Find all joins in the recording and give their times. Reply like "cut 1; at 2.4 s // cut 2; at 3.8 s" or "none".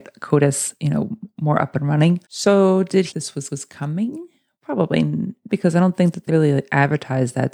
cut 1; at 2.2 s // cut 2; at 3.1 s // cut 3; at 3.5 s // cut 4; at 5.5 s // cut 5; at 6.3 s